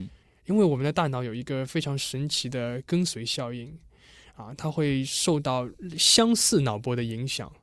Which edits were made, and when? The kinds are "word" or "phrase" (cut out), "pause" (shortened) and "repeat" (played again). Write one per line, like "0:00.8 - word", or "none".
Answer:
none